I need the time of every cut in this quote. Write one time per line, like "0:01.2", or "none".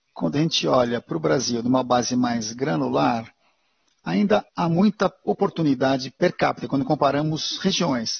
0:04.5